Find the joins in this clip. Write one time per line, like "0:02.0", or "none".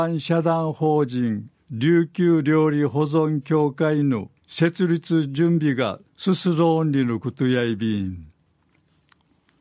0:01.5
0:04.4
0:06.1